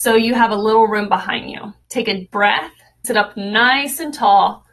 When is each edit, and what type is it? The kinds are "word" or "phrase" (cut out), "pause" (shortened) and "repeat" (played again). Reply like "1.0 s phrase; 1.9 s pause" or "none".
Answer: 1.8 s pause; 2.3 s word; 3.0 s word